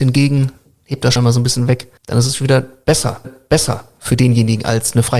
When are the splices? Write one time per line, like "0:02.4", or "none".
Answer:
0:01.2
0:02.0
0:03.2